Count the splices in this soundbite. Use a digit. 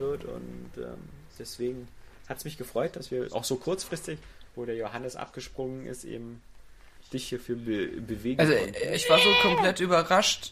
1